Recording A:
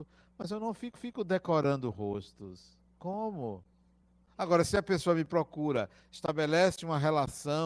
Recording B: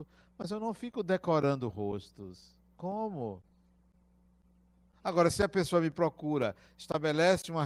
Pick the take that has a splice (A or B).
A